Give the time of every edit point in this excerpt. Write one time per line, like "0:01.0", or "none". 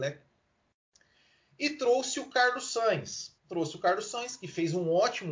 0:03.4